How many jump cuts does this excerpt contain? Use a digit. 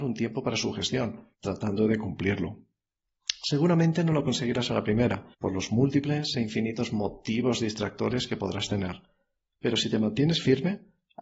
2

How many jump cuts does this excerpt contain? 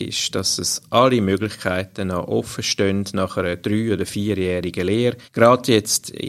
1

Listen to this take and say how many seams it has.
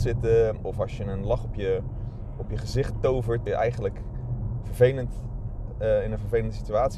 1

